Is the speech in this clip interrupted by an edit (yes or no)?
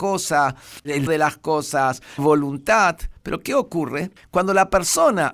yes